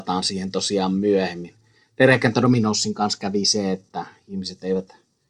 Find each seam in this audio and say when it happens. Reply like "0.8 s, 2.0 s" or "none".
none